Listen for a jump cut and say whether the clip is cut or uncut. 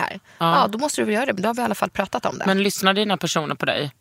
uncut